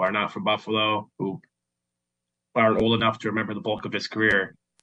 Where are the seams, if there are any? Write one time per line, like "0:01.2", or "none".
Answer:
0:01.1

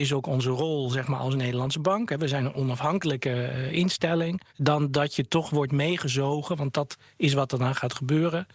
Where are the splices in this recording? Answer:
0:04.5

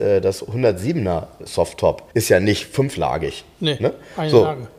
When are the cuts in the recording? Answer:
0:02.1

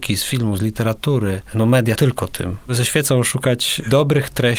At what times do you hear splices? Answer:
0:01.9
0:02.7

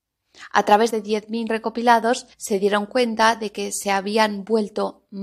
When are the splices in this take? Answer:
0:00.9
0:01.5
0:02.3

